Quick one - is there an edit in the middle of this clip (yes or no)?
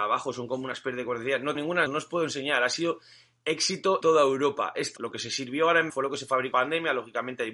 yes